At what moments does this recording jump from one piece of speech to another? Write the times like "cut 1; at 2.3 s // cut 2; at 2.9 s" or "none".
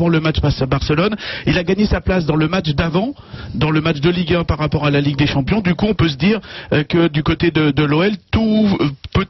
none

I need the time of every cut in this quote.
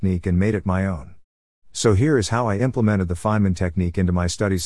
none

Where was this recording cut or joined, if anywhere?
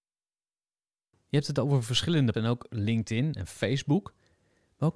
cut 1; at 2.3 s

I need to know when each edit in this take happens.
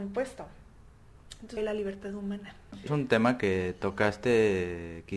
cut 1; at 1.6 s // cut 2; at 2.9 s

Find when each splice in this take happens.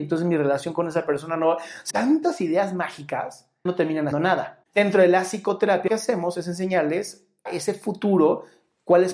cut 1; at 1.9 s // cut 2; at 3.7 s // cut 3; at 4.1 s // cut 4; at 5.9 s // cut 5; at 7.5 s

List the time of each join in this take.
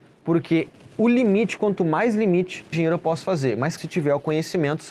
cut 1; at 2.7 s // cut 2; at 3.8 s

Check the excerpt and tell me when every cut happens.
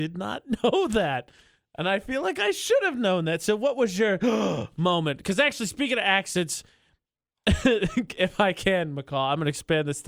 none

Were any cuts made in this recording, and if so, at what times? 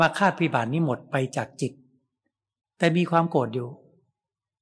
none

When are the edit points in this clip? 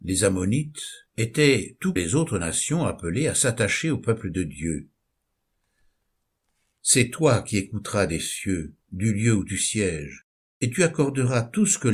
cut 1; at 1.1 s // cut 2; at 2.0 s

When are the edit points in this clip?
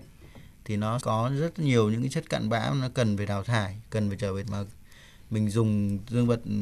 cut 1; at 1.0 s // cut 2; at 4.4 s

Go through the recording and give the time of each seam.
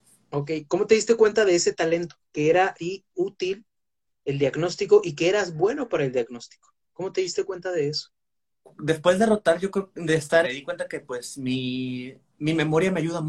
cut 1; at 2.3 s // cut 2; at 2.8 s // cut 3; at 6.8 s // cut 4; at 10.4 s

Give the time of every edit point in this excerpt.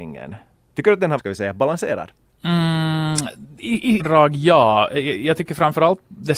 cut 1; at 1.2 s // cut 2; at 4.0 s

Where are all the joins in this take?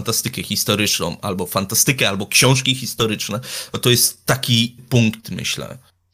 cut 1; at 4.8 s

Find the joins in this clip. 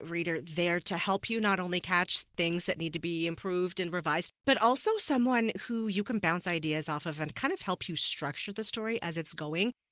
cut 1; at 4.4 s

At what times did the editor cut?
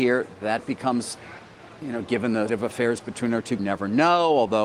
cut 1; at 2.5 s // cut 2; at 3.6 s

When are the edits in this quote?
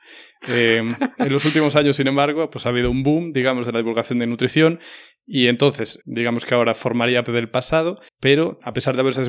cut 1; at 6.0 s // cut 2; at 7.3 s // cut 3; at 8.1 s

